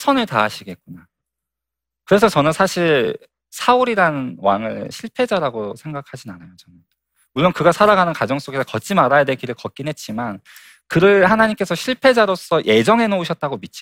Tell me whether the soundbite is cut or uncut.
uncut